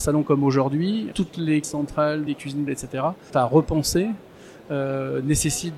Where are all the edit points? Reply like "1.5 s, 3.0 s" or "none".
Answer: 1.1 s, 1.6 s, 2.3 s, 2.7 s, 3.3 s